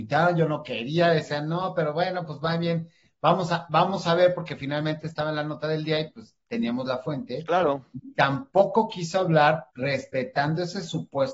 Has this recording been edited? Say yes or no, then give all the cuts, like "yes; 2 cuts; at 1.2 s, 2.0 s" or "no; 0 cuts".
yes; 1 cut; at 9.7 s